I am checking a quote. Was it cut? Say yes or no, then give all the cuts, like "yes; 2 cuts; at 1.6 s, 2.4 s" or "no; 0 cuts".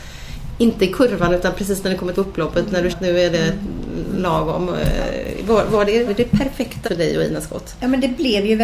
yes; 4 cuts; at 2.1 s, 2.9 s, 6.1 s, 6.8 s